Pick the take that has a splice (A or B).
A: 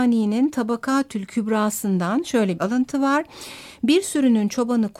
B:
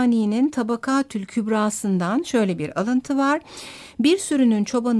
A